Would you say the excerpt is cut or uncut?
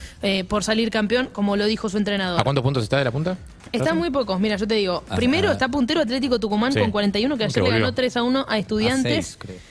uncut